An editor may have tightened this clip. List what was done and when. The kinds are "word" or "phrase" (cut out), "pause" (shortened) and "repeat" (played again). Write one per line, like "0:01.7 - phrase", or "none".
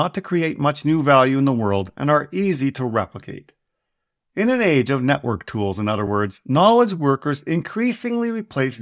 none